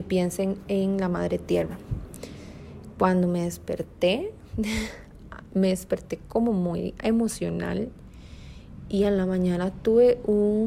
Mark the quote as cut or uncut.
uncut